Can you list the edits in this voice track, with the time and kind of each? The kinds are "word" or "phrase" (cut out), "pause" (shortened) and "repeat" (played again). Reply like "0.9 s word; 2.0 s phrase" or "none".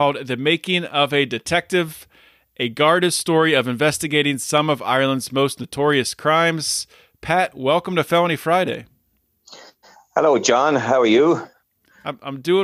none